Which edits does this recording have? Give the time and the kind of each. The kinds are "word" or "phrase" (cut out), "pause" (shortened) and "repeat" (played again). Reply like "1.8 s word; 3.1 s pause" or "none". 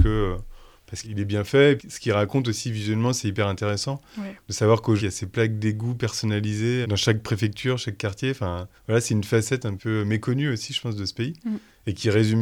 1.0 s phrase; 1.8 s word; 5.0 s phrase; 6.8 s word; 8.8 s pause; 9.8 s word